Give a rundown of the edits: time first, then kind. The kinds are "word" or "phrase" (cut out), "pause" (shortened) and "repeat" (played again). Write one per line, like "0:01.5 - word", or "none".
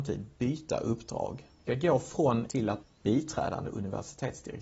0:01.7 - word
0:02.5 - word
0:02.8 - word

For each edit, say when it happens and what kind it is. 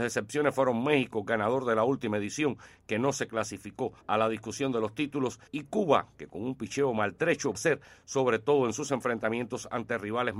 0:04.0 - pause
0:05.5 - pause
0:07.5 - phrase

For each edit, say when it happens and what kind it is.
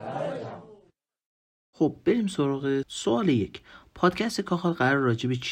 0:02.8 - word

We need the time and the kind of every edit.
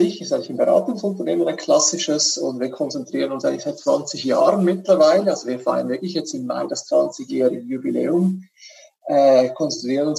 none

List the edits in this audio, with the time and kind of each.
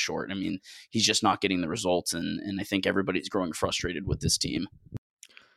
none

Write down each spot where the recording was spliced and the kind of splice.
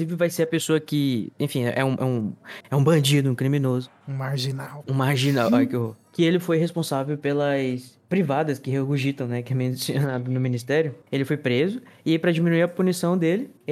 none

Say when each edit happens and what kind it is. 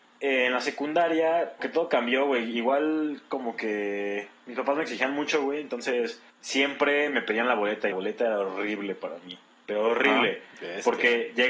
0:01.6 - word
0:06.3 - pause
0:07.9 - phrase

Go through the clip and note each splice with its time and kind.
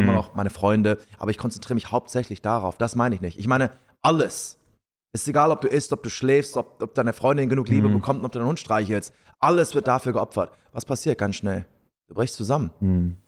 none

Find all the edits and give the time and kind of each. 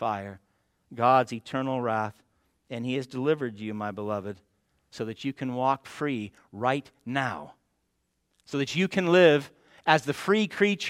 none

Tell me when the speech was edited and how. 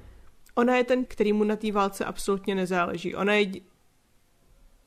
0:01.0 - word

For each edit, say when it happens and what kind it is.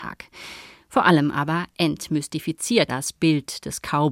0:02.9 - word

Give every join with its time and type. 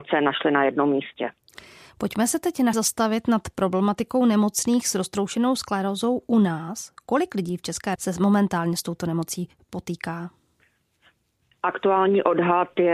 0:02.7 - word
0:08.0 - word

